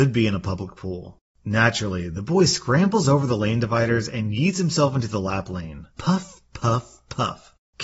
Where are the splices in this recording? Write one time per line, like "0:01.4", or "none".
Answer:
0:05.9